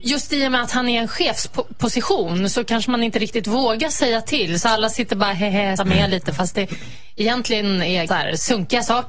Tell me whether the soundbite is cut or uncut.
cut